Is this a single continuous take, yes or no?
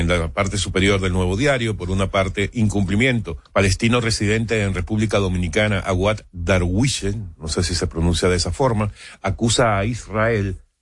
no